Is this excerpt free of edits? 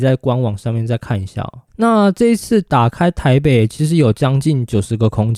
no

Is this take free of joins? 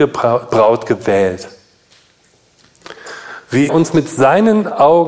no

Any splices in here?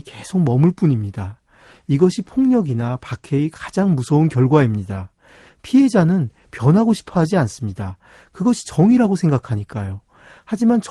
no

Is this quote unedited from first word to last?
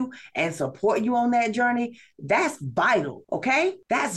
yes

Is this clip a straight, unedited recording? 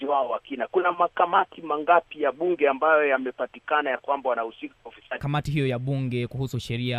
no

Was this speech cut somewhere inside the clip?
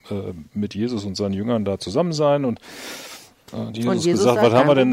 no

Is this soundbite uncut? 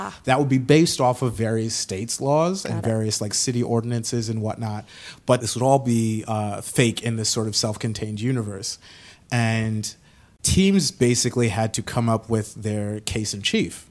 yes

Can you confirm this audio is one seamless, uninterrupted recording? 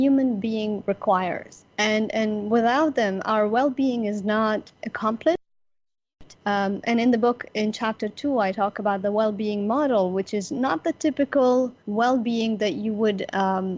no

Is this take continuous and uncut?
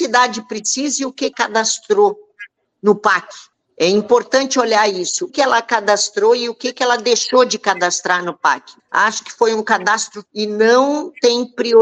no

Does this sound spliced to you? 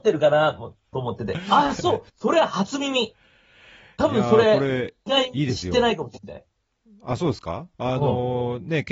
yes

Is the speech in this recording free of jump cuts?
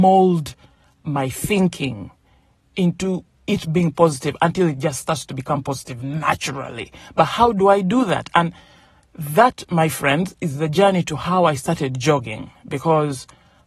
yes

